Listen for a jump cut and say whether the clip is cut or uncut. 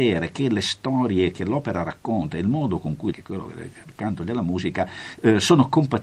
cut